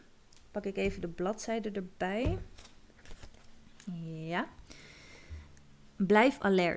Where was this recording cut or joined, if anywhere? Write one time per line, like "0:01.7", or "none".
none